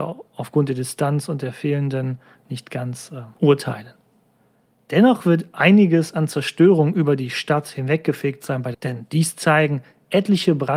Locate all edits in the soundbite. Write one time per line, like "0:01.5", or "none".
0:02.3
0:03.3
0:08.7